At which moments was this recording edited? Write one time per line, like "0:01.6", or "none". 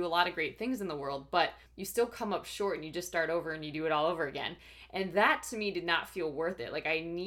0:01.7